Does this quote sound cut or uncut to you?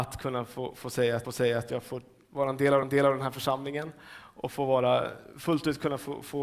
cut